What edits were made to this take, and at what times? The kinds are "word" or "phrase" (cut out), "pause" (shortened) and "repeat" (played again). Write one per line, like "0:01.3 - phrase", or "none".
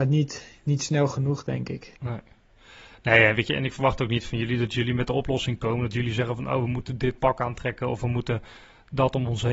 0:02.0 - pause